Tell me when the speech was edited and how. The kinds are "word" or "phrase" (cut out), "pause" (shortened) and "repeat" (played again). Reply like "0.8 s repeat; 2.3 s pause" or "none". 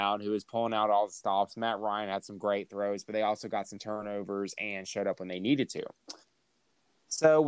none